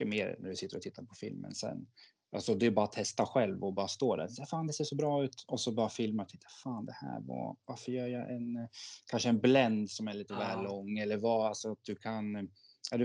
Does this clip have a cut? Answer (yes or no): no